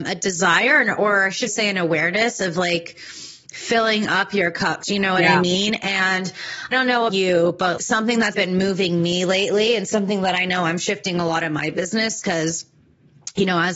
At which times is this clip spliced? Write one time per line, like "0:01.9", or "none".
0:01.5
0:04.8
0:06.7
0:07.1
0:07.8
0:08.3